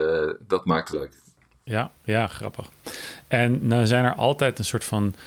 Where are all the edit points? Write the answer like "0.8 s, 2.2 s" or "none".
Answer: 0.9 s, 2.0 s